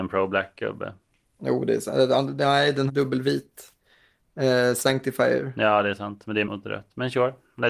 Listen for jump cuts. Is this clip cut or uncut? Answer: cut